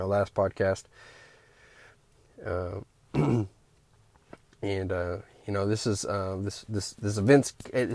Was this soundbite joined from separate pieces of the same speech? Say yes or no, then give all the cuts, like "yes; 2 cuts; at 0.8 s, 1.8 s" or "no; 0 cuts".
no; 0 cuts